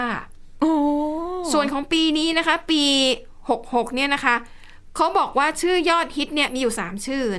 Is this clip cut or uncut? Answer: uncut